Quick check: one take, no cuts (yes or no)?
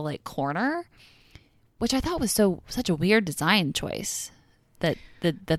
yes